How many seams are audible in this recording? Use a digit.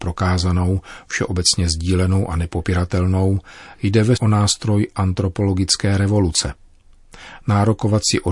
1